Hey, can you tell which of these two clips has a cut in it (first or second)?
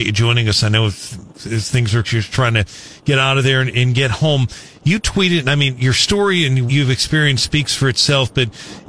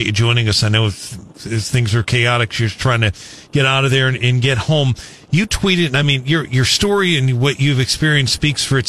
first